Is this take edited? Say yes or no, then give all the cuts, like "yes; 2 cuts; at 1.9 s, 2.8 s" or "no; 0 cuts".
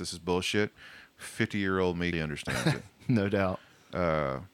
yes; 1 cut; at 2.1 s